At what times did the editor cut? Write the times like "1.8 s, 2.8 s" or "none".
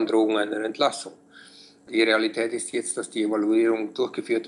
none